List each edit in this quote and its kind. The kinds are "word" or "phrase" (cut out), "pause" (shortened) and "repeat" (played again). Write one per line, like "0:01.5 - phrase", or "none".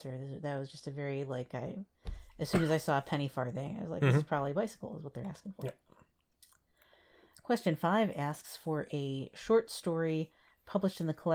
none